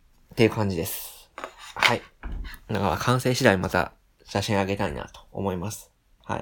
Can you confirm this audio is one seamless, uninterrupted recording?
yes; 0 cuts

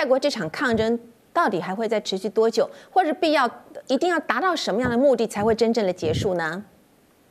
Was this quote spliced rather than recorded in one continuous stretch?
no; 0 cuts

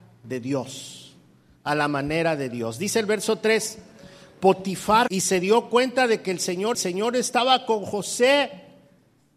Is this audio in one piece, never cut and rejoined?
no; 2 cuts; at 5.1 s, 6.7 s

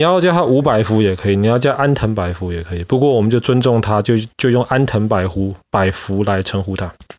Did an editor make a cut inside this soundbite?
no; 0 cuts

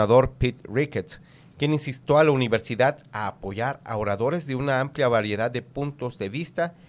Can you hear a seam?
no; 0 cuts

